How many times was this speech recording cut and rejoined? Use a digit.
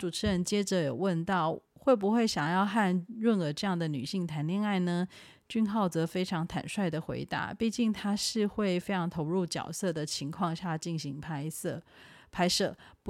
1